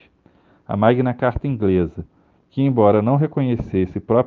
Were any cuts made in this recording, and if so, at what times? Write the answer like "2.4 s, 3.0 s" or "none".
none